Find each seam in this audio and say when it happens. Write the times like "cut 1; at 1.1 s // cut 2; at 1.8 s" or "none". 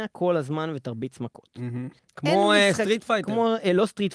cut 1; at 2.0 s